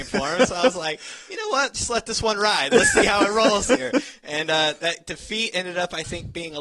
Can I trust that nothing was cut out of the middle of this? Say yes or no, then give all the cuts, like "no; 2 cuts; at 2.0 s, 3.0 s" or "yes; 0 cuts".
yes; 0 cuts